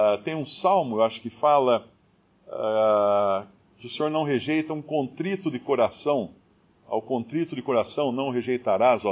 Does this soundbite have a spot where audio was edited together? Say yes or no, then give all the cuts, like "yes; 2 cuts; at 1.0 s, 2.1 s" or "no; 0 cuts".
yes; 1 cut; at 6.4 s